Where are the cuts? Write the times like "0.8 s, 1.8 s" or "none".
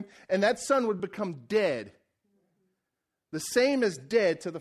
none